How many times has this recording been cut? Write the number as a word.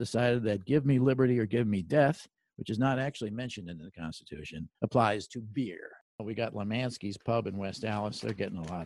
one